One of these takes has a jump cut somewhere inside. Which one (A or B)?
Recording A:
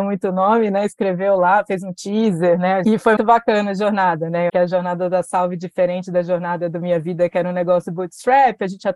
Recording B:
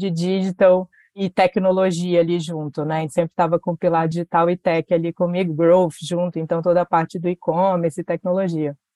A